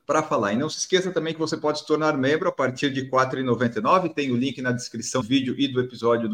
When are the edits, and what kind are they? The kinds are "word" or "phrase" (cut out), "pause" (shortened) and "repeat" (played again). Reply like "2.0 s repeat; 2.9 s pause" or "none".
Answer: 5.2 s word